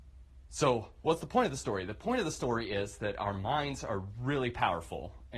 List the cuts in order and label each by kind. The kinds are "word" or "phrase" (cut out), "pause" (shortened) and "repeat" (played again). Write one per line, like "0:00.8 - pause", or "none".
none

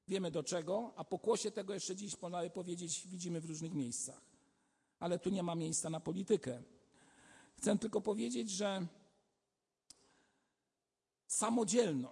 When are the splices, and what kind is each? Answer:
none

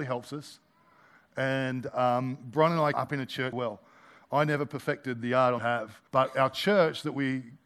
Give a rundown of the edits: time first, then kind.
0:02.9 - word
0:03.5 - phrase
0:05.6 - phrase
0:06.1 - pause

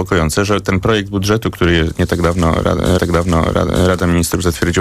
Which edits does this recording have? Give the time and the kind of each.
0:03.0 - repeat

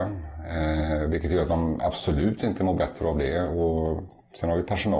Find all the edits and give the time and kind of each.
none

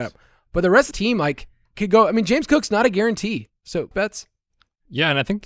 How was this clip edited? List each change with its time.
0:00.9 - word
0:01.7 - pause
0:03.9 - phrase

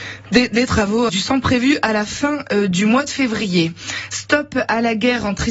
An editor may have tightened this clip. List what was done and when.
0:01.1 - word

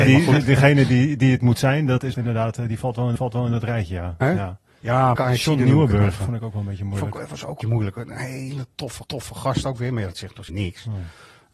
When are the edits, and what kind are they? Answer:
0:02.1 - phrase
0:03.2 - repeat
0:04.2 - word
0:05.2 - word
0:07.6 - word
0:09.0 - repeat
0:10.5 - word

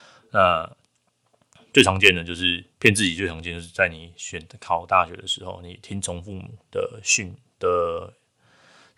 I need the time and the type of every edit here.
0:02.7 - pause

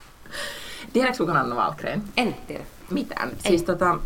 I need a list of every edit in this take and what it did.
0:01.3 - word
0:02.5 - word
0:02.9 - phrase

